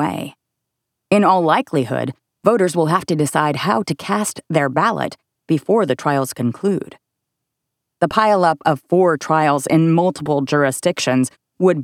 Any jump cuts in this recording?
no; 0 cuts

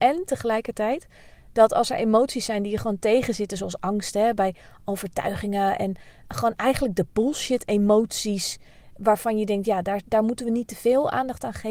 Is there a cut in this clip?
no; 0 cuts

